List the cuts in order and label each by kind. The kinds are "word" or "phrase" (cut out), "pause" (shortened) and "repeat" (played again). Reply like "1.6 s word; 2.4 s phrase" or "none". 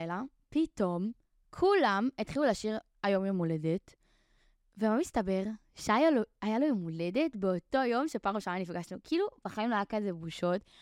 none